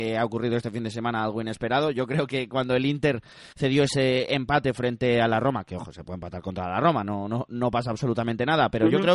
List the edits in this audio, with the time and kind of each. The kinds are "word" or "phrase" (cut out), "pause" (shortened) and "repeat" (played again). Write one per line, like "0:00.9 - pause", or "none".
0:03.5 - pause